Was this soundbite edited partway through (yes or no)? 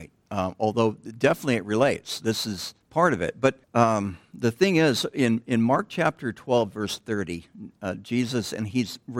yes